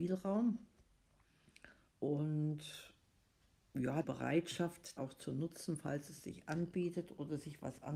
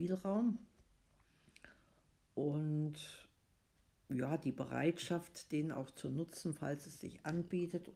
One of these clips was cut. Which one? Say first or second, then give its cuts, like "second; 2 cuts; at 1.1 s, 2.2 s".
first; 3 cuts; at 1.9 s, 4.0 s, 5.0 s